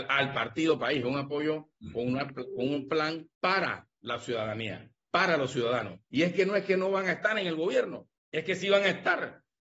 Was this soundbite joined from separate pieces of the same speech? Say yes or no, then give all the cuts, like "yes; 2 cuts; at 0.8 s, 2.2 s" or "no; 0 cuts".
yes; 3 cuts; at 3.3 s, 6.0 s, 8.2 s